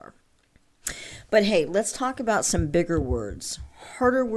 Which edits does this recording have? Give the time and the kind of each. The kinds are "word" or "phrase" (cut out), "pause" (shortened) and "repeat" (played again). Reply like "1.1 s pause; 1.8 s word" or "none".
none

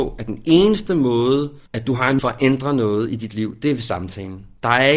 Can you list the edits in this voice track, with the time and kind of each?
1.7 s pause; 2.2 s word

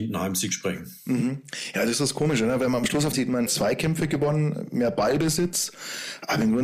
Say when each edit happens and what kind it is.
3.1 s phrase; 3.5 s word

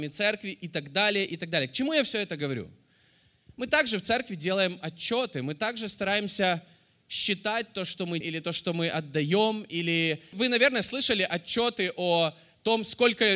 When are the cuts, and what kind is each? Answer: 8.2 s word

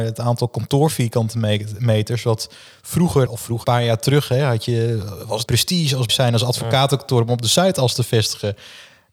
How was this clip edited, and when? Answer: 3.3 s word; 3.6 s word; 5.5 s word; 6.1 s word

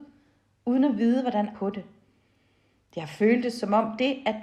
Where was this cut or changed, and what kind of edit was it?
1.5 s phrase

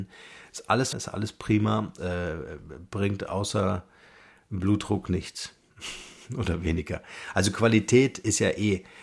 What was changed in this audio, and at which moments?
0.9 s word; 2.0 s phrase

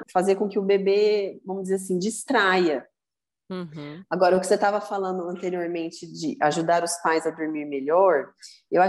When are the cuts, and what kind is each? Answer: none

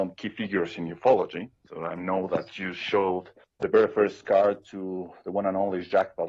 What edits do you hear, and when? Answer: 3.4 s pause

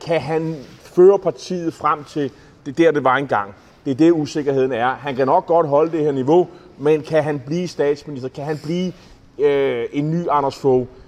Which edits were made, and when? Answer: none

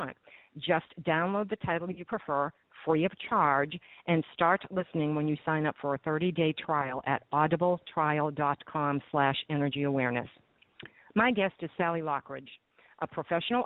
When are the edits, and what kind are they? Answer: none

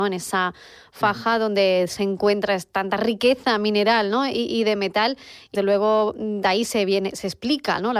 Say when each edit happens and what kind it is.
5.5 s word

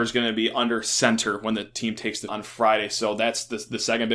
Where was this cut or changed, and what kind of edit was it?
2.3 s word

